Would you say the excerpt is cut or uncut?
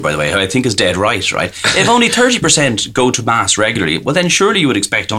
uncut